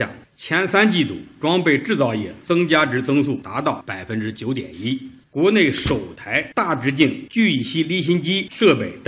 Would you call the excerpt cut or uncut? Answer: uncut